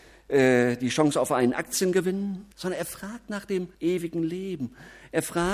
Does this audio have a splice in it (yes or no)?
yes